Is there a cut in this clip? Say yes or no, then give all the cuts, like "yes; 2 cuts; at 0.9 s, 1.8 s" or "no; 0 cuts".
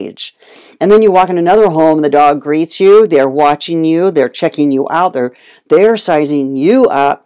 no; 0 cuts